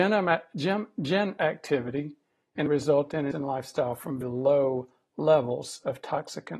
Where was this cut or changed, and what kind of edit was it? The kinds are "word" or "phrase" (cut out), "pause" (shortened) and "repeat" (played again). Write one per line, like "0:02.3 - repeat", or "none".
0:01.4 - word
0:02.7 - word
0:03.3 - word
0:04.2 - word